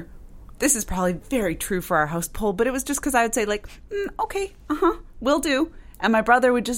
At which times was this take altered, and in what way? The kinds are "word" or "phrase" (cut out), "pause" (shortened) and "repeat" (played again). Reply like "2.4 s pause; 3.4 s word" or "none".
none